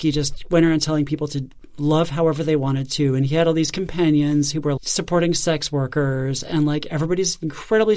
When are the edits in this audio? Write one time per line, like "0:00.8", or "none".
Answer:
0:04.8

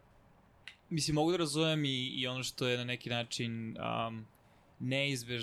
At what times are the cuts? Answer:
none

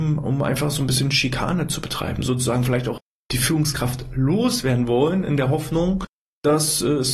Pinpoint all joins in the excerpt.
none

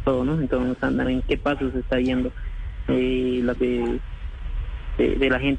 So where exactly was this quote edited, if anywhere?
0:01.0
0:03.5

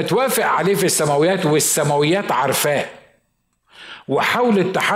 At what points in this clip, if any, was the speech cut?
none

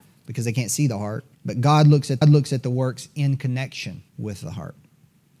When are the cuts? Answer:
0:01.3
0:02.2
0:04.1

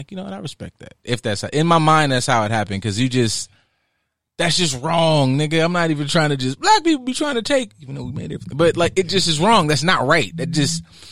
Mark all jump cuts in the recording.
none

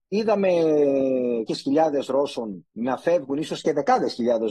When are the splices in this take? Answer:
0:01.5
0:02.7

